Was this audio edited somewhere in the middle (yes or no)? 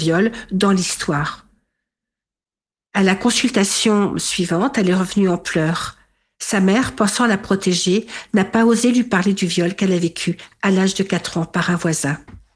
no